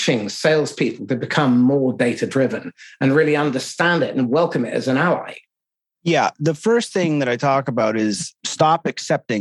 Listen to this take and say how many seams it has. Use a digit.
0